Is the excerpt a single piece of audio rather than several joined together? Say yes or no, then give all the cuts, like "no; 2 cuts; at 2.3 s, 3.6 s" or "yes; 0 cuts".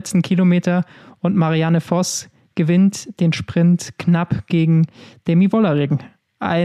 yes; 0 cuts